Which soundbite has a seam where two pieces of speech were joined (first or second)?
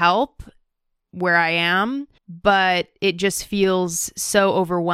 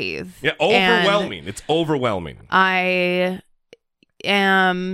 first